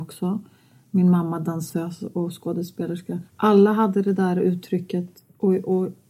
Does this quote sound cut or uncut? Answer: cut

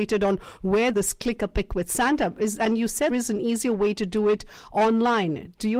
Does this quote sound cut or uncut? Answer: cut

